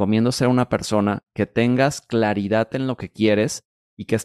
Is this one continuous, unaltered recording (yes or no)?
yes